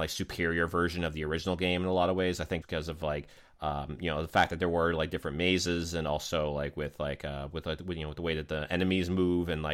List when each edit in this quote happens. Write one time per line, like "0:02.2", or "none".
0:02.6